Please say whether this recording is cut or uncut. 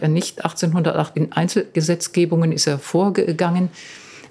cut